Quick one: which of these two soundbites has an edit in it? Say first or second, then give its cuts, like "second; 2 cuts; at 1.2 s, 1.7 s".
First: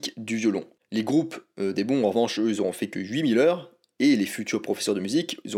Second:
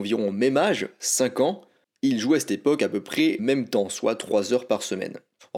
second; 1 cut; at 3.4 s